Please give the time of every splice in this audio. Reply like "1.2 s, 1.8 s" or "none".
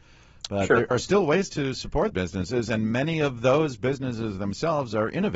0.9 s, 2.1 s